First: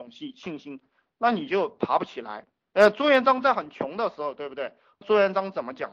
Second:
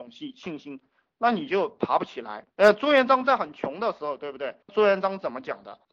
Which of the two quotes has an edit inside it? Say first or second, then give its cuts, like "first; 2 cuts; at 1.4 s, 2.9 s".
second; 2 cuts; at 2.5 s, 4.6 s